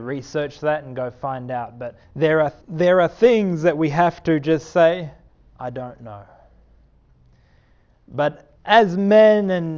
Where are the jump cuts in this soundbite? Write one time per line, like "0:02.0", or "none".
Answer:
0:02.0
0:02.6
0:05.3
0:08.6